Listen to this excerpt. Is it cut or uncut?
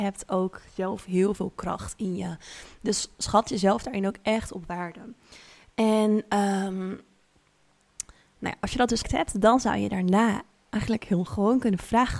cut